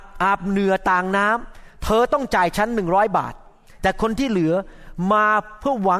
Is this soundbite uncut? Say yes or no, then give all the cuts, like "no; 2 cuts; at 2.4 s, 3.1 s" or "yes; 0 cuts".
yes; 0 cuts